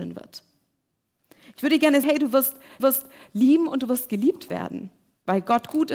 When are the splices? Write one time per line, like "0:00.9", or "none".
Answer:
0:02.0
0:02.8